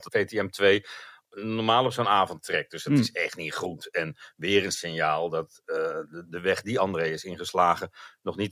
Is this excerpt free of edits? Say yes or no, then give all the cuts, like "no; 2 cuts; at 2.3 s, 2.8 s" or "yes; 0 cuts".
yes; 0 cuts